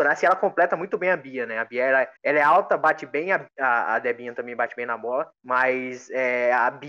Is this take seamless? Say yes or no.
no